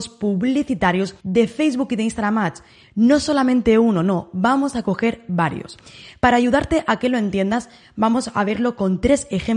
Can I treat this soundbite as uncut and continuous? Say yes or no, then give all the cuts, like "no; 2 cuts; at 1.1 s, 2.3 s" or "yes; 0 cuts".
no; 1 cut; at 1.2 s